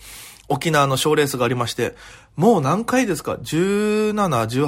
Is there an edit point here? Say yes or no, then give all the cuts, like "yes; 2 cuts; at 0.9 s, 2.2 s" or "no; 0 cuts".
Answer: no; 0 cuts